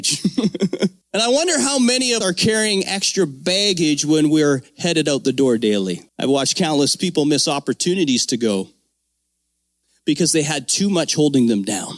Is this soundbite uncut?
no; 3 cuts; at 1.0 s, 2.2 s, 6.1 s

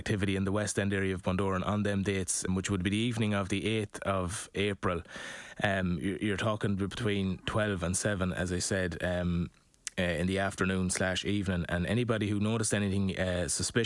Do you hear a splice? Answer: yes; 1 cut; at 2.5 s

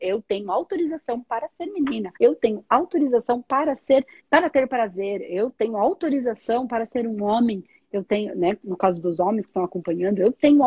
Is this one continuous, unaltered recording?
no; 2 cuts; at 2.2 s, 4.2 s

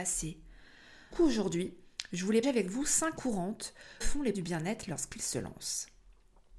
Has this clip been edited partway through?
yes; 5 cuts; at 1.1 s, 2.4 s, 3.2 s, 4.0 s, 4.3 s

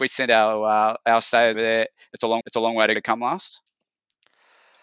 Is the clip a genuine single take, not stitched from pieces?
no; 3 cuts; at 1.5 s, 2.4 s, 2.9 s

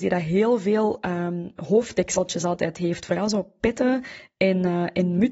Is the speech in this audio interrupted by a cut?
no; 0 cuts

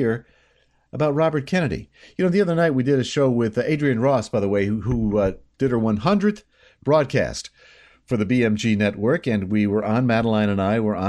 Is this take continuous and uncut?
yes; 0 cuts

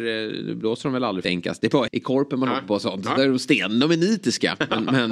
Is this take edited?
yes; 2 cuts; at 1.2 s, 1.9 s

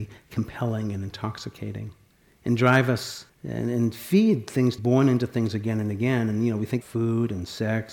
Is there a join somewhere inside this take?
yes; 4 cuts; at 2.1 s, 3.3 s, 4.8 s, 6.8 s

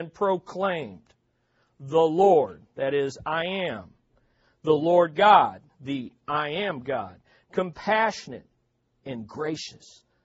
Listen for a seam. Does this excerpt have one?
no; 0 cuts

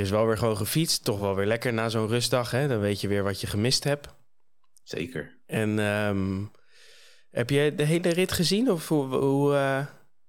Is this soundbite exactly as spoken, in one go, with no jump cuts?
yes; 0 cuts

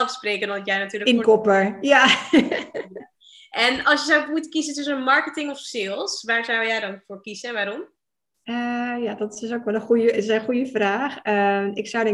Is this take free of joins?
yes; 0 cuts

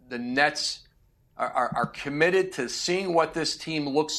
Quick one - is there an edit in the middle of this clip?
no; 0 cuts

